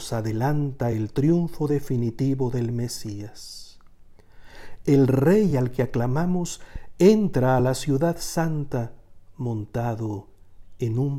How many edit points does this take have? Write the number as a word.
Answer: zero